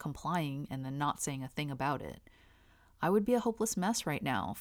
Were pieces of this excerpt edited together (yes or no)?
no